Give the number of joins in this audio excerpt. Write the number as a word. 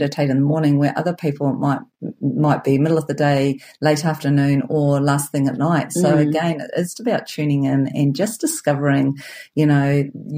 zero